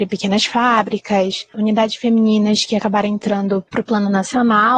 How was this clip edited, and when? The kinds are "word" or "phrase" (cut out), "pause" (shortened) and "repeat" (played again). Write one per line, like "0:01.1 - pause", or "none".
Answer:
0:03.7 - pause